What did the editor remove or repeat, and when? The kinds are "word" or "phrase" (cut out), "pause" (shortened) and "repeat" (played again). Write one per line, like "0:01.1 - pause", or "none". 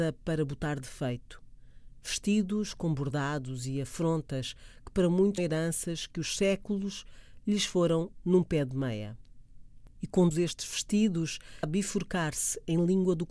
0:05.4 - word
0:08.2 - word
0:10.3 - word
0:11.6 - word